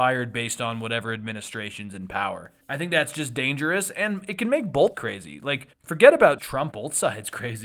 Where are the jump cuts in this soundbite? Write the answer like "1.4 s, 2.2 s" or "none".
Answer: 2.6 s, 4.9 s, 5.7 s, 6.4 s, 6.7 s